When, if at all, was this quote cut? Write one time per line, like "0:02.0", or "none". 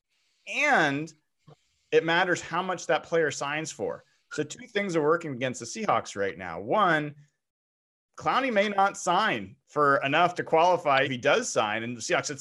0:11.0